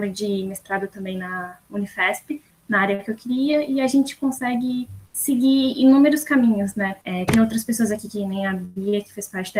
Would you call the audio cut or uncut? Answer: cut